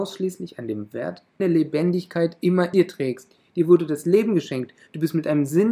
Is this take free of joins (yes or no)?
no